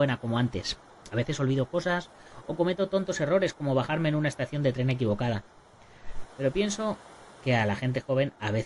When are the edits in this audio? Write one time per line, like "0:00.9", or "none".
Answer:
none